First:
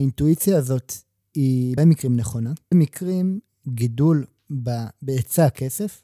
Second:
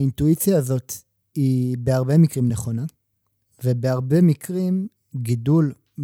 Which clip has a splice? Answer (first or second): first